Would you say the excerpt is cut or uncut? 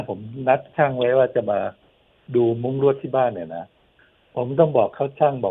uncut